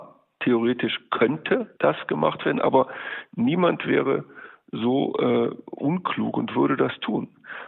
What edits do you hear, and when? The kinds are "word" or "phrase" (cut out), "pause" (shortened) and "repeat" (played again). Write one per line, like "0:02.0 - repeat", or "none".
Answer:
0:01.8 - pause